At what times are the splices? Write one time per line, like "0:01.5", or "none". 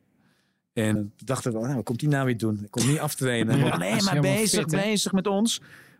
0:01.0
0:03.7